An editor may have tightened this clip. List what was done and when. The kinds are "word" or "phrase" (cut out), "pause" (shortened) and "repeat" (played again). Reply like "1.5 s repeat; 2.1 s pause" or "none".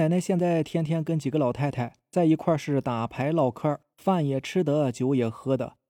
3.9 s pause